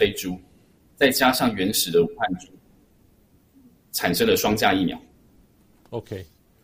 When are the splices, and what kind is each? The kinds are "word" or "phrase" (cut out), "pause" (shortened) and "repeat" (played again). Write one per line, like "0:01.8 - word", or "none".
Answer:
none